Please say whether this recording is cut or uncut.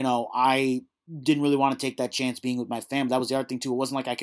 uncut